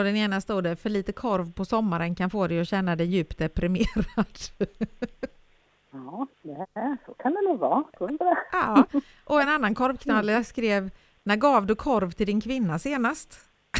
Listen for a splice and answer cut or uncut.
uncut